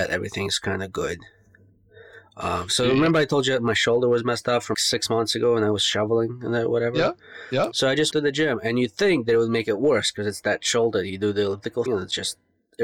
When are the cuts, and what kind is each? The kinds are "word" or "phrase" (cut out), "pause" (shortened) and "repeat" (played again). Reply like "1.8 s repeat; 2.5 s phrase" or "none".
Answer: 4.7 s word; 8.1 s word; 11.9 s word